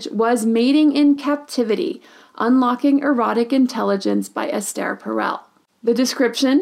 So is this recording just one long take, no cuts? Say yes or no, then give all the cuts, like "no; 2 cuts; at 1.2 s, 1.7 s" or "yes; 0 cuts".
yes; 0 cuts